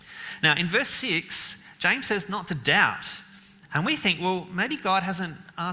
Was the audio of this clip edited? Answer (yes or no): no